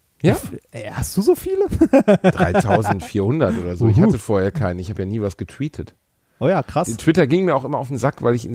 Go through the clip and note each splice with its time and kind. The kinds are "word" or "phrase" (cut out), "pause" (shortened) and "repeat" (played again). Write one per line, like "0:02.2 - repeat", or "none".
none

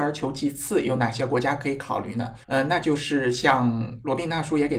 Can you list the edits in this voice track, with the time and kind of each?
0:02.4 - pause

